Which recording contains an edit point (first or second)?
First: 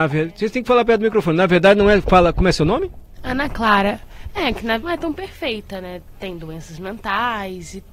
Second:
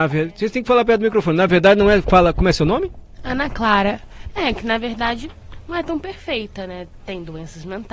first